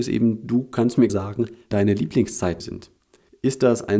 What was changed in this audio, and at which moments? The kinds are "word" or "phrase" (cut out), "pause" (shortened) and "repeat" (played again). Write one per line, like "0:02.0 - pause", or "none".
0:01.1 - word
0:01.7 - word
0:02.6 - word